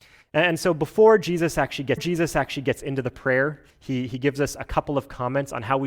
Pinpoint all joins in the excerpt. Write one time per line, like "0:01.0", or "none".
0:02.0
0:03.7